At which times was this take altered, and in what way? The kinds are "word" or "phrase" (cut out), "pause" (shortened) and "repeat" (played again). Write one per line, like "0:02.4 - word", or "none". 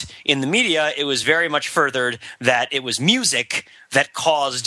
none